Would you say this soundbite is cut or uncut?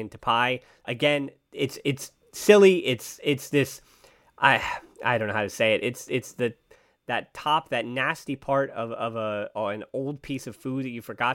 uncut